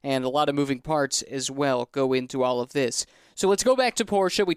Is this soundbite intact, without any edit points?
yes; 0 cuts

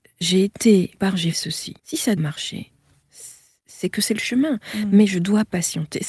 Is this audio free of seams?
no; 4 cuts; at 0.9 s, 1.3 s, 1.8 s, 2.2 s

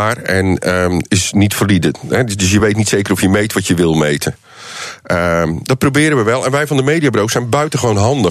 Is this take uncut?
yes; 0 cuts

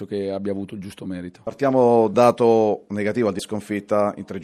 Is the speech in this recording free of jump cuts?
no; 2 cuts; at 2.1 s, 3.4 s

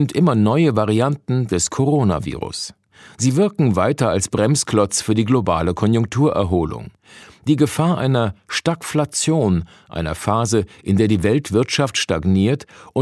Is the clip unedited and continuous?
yes; 0 cuts

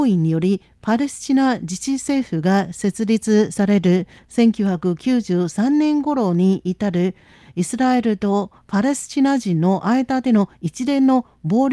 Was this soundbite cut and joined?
no; 0 cuts

